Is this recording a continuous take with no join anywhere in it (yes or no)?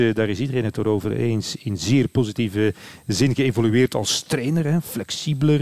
yes